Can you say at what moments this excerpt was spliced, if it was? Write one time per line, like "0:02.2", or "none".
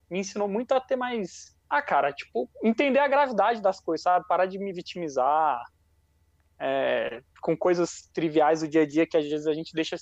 0:01.6
0:02.5